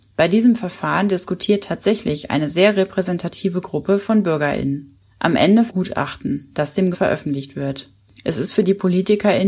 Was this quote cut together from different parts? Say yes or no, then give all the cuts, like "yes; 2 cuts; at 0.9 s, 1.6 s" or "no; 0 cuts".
yes; 2 cuts; at 5.7 s, 6.9 s